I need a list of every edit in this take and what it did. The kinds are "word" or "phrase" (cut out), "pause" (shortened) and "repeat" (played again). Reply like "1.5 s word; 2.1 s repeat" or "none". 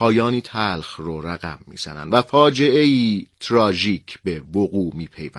none